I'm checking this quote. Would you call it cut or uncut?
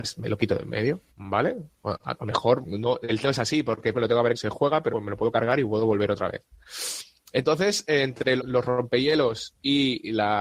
cut